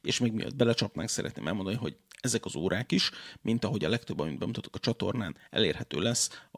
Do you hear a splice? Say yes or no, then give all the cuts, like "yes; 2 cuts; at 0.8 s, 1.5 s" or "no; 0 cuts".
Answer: no; 0 cuts